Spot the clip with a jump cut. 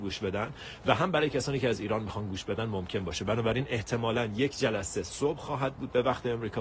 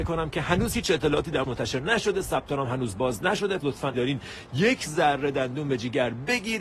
second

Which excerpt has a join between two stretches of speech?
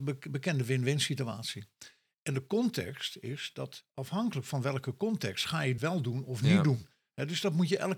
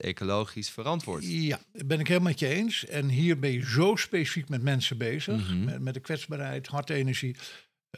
first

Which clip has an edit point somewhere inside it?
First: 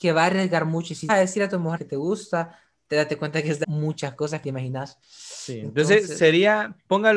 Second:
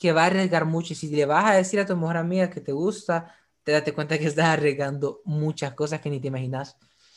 first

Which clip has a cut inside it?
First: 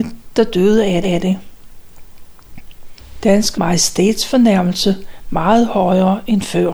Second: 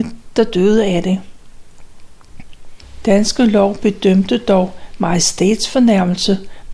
first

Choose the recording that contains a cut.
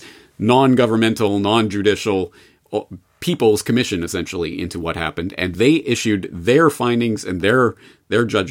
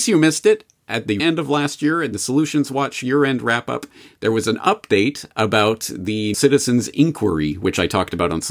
second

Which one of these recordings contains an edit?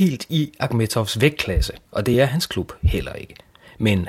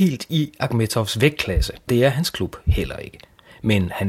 second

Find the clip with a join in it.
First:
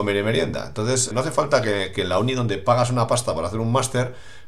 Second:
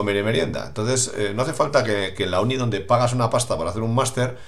first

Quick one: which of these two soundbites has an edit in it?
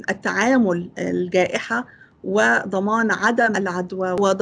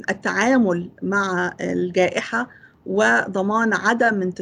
first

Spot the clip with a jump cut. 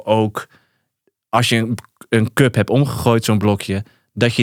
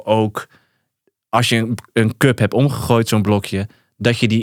second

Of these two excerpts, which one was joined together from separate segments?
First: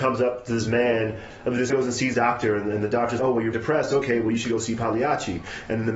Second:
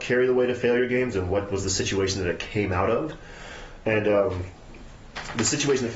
first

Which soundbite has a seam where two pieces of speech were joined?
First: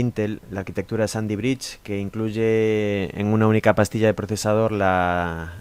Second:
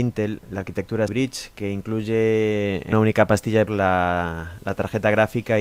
second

